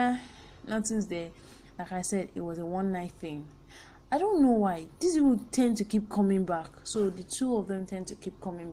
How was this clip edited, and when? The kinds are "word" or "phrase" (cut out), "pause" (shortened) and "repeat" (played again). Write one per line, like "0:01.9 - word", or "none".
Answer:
none

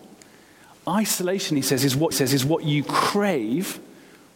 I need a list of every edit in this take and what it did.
0:02.1 - repeat

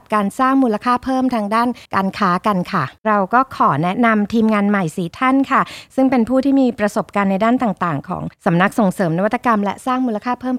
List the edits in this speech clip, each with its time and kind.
0:01.9 - pause
0:03.0 - pause
0:08.3 - pause

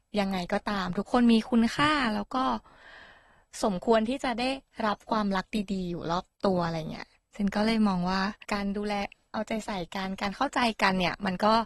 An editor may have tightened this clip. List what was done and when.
0:06.3 - pause
0:08.4 - pause

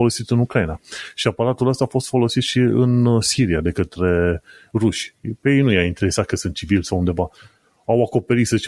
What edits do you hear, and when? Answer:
none

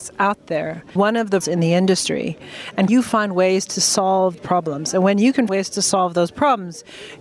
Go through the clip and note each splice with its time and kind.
0:01.0 - word
0:01.4 - word
0:02.9 - word
0:04.4 - word
0:05.5 - word

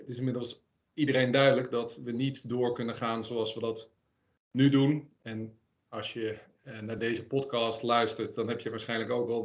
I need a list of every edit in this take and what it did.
none

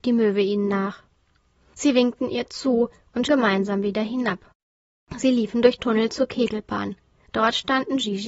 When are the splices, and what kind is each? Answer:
0:03.3 - word
0:05.8 - word

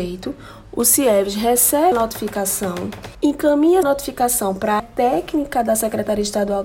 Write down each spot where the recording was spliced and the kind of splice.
0:01.9 - word
0:03.8 - word
0:04.8 - word

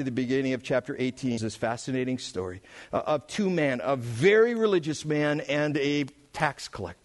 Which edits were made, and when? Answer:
0:01.4 - word

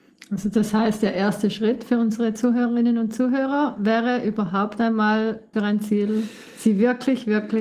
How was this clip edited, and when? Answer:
0:05.5 - phrase

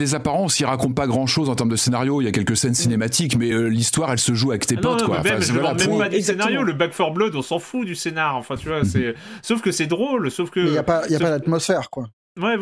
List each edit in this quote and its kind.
none

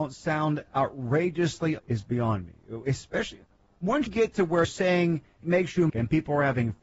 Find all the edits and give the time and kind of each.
0:01.8 - word
0:04.1 - word
0:04.6 - word
0:05.4 - word
0:05.9 - word

